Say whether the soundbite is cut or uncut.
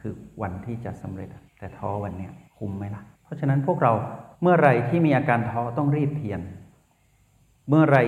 cut